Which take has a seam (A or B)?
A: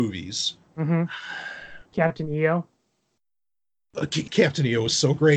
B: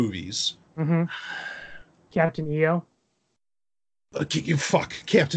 A